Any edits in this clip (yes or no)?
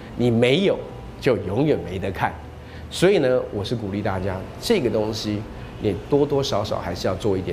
no